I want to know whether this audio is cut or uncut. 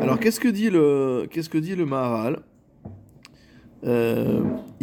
uncut